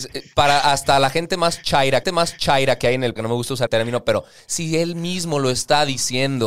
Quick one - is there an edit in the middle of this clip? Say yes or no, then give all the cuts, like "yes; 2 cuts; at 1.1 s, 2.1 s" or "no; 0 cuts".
yes; 3 cuts; at 2.0 s, 3.2 s, 3.7 s